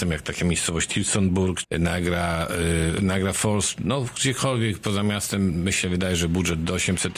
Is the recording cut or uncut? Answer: cut